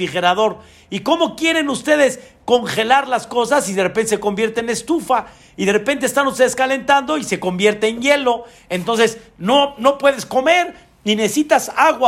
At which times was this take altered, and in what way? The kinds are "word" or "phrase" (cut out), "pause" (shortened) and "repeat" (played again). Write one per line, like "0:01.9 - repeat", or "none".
none